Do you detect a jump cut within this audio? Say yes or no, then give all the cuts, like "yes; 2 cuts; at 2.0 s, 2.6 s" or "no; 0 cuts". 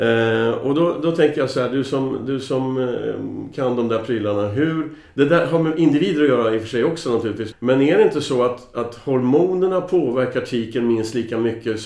yes; 1 cut; at 7.5 s